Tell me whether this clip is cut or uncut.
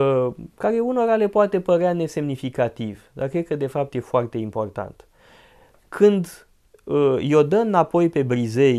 uncut